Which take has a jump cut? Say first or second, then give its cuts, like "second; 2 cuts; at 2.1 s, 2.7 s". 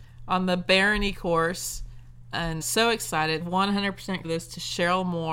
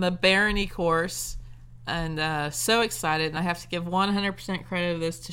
first; 3 cuts; at 2.6 s, 3.4 s, 4.2 s